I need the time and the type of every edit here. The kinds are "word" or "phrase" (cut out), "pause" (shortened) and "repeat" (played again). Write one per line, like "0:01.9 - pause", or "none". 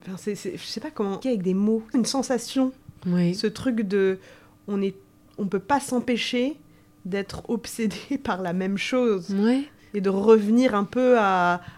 0:01.2 - word
0:01.9 - word
0:03.0 - pause